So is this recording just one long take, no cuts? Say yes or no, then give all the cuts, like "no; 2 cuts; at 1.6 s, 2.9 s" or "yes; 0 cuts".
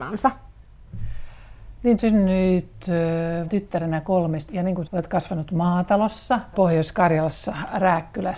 no; 5 cuts; at 2.0 s, 3.5 s, 4.5 s, 4.9 s, 6.5 s